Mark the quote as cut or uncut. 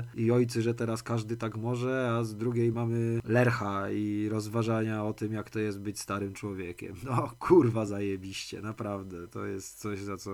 uncut